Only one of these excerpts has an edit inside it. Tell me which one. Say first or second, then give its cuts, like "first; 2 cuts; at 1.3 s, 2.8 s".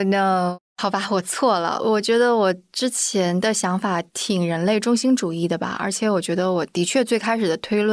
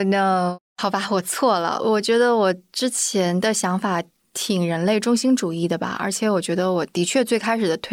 first; 1 cut; at 4.1 s